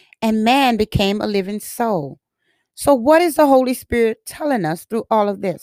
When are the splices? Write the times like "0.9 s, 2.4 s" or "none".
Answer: none

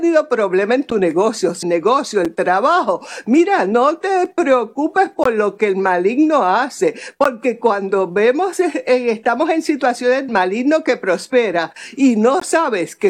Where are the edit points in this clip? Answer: 1.6 s, 10.3 s

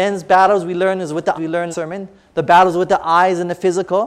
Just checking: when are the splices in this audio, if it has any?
1.4 s, 1.7 s

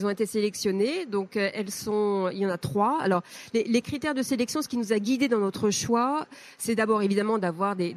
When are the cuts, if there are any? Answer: none

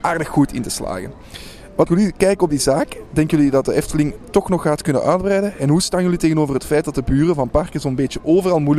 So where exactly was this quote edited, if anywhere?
1.9 s

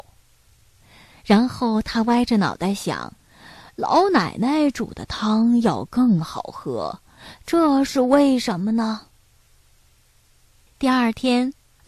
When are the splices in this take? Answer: 3.2 s

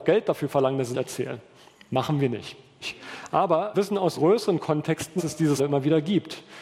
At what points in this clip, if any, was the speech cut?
0.9 s, 2.8 s, 3.7 s, 4.1 s, 5.2 s, 5.6 s

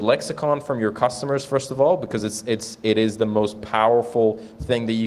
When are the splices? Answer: none

